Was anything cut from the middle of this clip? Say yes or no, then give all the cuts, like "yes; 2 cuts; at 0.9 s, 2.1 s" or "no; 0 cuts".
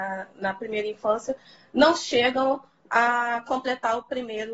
no; 0 cuts